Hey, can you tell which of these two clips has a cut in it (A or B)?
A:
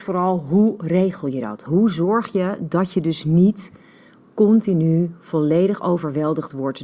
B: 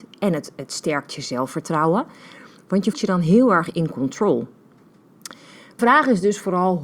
B